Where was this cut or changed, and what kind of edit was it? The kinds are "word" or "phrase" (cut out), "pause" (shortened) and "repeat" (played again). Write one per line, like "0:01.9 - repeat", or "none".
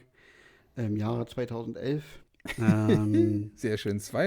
0:02.2 - pause